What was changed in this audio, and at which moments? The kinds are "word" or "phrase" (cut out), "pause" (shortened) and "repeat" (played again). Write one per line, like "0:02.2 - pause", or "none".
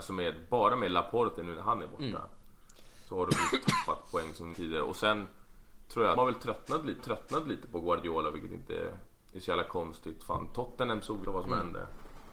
0:04.5 - phrase
0:06.1 - phrase
0:07.0 - repeat
0:11.2 - word